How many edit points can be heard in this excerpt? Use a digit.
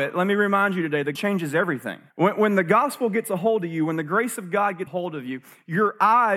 3